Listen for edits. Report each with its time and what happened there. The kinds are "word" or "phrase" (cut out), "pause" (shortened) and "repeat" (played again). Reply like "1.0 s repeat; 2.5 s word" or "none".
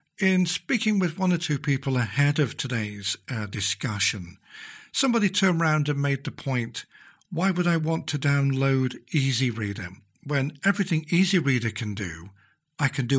none